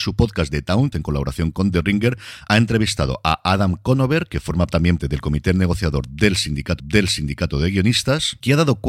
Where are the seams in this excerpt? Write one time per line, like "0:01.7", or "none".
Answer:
0:00.9
0:05.0
0:06.8